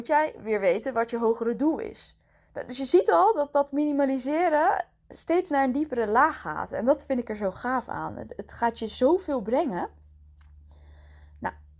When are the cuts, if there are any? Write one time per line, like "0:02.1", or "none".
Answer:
none

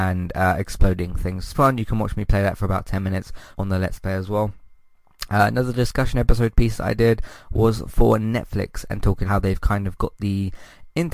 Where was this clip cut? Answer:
0:01.5
0:03.5
0:09.3

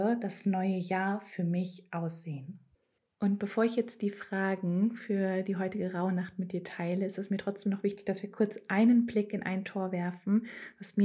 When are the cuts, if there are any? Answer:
0:02.7

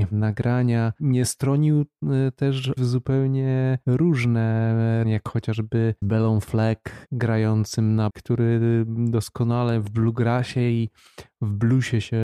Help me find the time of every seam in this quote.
0:02.8
0:05.0
0:06.0
0:08.1

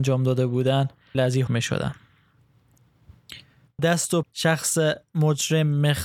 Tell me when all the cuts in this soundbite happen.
0:01.1
0:01.5
0:03.8
0:04.2

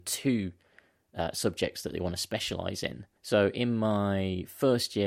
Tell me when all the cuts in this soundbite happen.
0:03.2

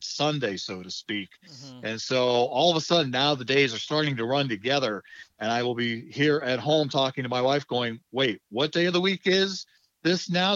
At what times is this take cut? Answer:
none

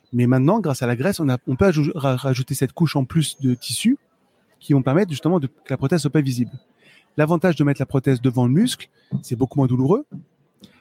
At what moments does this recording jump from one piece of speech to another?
none

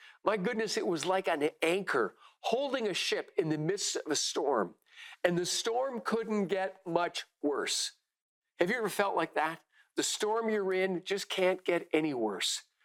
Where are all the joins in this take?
none

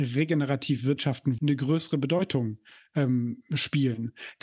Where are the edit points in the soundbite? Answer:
0:01.4

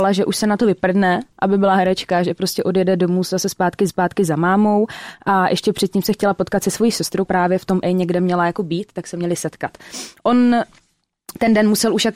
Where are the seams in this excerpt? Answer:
0:03.9
0:07.2
0:07.8

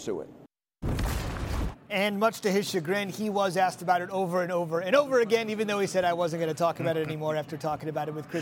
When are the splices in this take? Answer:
none

